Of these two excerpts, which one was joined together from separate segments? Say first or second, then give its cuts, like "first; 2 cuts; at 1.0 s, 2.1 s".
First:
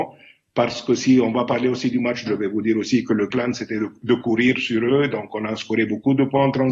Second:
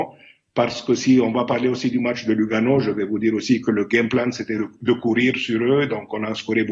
first; 2 cuts; at 2.3 s, 3.3 s